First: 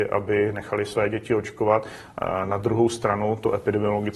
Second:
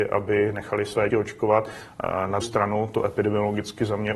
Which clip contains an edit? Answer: second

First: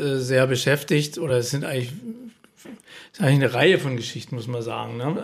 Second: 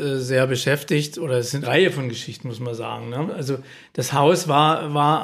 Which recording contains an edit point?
second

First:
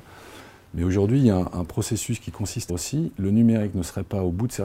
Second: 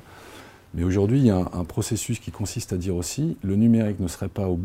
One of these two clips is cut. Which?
first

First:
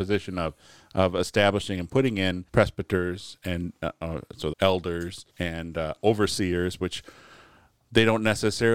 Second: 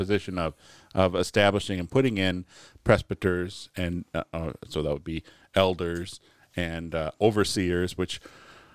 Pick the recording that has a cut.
first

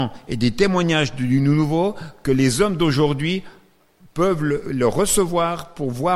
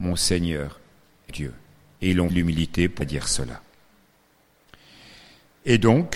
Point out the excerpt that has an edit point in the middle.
second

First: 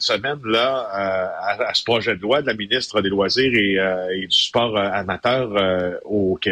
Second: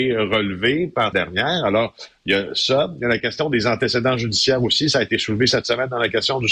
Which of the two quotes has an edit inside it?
second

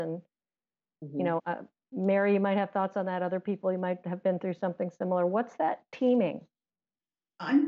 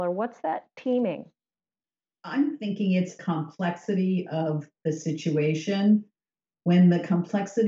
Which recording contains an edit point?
second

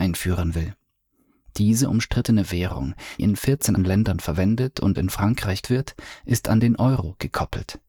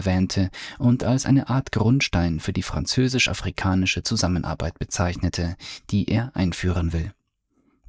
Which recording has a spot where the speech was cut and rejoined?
first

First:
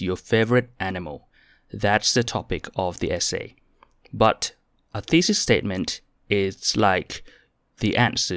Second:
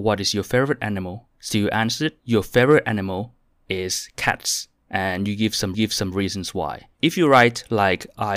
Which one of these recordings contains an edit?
second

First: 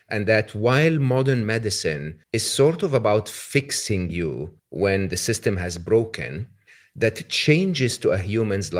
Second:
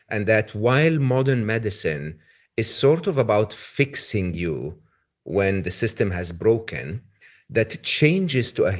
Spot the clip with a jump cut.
first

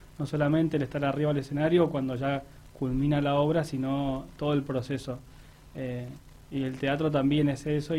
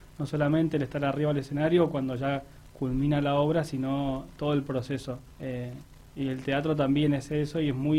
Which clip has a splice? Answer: second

